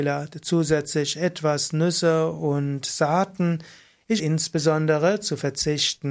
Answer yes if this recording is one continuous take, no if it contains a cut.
no